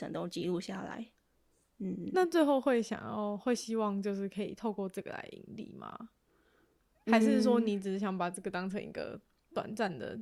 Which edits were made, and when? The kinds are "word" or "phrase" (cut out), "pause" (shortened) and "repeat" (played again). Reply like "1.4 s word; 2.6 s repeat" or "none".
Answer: none